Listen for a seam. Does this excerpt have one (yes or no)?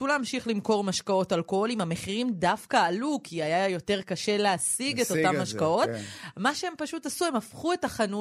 no